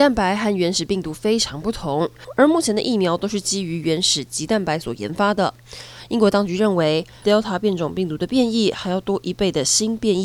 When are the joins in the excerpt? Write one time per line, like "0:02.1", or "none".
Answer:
0:07.2